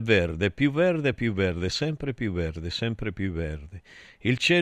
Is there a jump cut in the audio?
no; 0 cuts

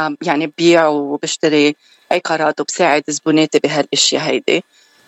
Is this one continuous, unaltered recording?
yes; 0 cuts

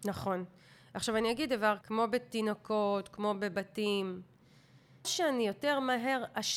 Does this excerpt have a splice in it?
yes; 2 cuts; at 1.8 s, 5.0 s

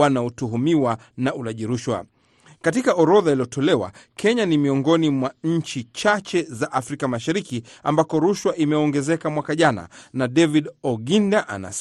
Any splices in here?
no; 0 cuts

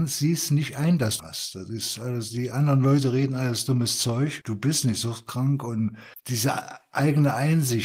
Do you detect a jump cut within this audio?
yes; 1 cut; at 1.2 s

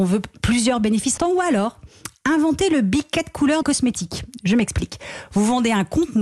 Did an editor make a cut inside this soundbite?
yes; 2 cuts; at 1.2 s, 3.6 s

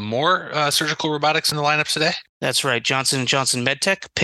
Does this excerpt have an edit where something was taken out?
yes; 2 cuts; at 1.5 s, 2.3 s

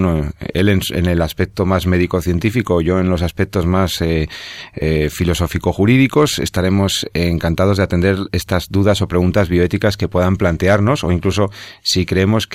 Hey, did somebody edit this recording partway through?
no; 0 cuts

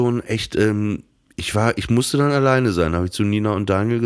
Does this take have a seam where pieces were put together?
no; 0 cuts

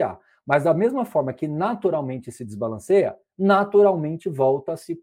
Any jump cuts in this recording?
no; 0 cuts

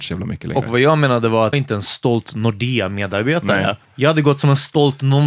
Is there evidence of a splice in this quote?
yes; 2 cuts; at 1.5 s, 3.8 s

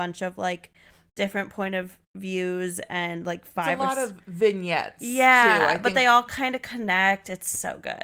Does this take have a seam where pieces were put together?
no; 0 cuts

